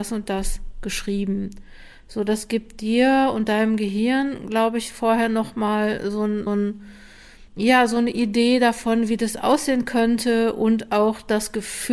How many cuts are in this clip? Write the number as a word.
two